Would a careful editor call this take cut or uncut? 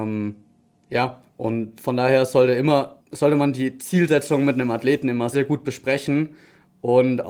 cut